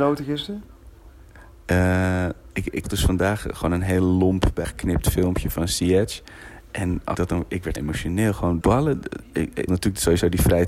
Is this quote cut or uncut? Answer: cut